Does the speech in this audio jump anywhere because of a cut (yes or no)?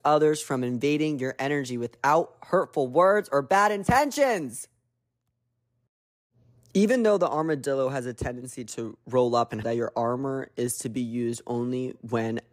yes